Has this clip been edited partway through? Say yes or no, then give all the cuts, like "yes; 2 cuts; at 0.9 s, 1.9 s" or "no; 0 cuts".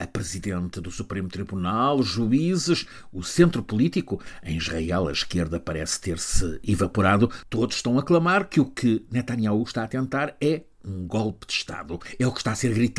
no; 0 cuts